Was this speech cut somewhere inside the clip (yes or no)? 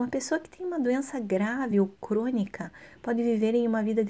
no